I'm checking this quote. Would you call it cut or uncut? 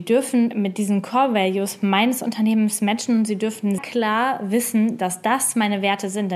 cut